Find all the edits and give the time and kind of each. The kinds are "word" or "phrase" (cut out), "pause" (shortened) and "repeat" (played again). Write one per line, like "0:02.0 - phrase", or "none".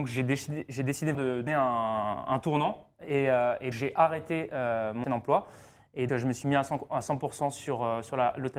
0:01.1 - word
0:01.5 - word
0:03.7 - word
0:05.0 - word
0:06.1 - word